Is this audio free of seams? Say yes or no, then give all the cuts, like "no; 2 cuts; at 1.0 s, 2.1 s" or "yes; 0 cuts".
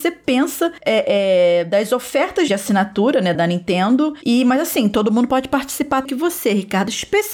no; 3 cuts; at 2.5 s, 3.3 s, 6.0 s